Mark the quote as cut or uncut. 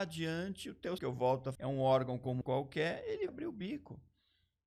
cut